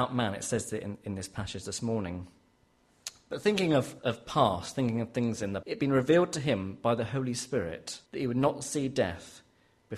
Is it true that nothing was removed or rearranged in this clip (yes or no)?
no